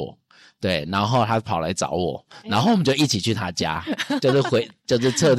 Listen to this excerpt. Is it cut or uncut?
uncut